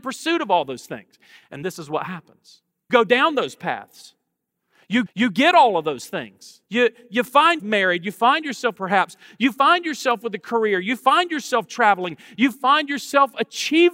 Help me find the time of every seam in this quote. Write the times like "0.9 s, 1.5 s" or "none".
1.6 s, 2.9 s, 5.1 s, 6.6 s, 7.6 s, 8.8 s